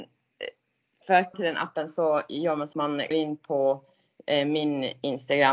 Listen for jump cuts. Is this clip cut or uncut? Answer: cut